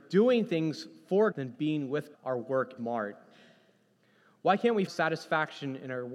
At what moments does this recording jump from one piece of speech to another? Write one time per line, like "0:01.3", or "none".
0:01.3
0:02.1
0:02.8
0:04.9